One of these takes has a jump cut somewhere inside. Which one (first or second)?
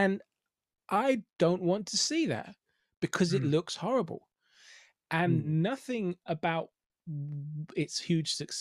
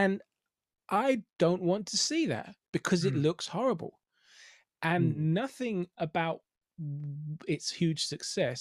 second